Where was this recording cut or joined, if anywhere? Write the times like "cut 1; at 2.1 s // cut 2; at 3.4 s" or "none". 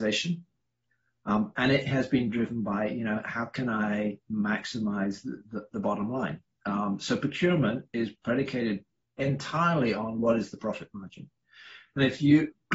none

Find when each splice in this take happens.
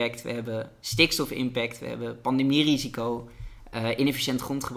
none

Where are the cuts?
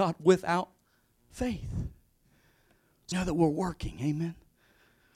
cut 1; at 3.1 s

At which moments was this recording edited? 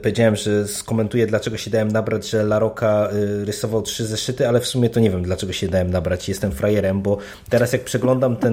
none

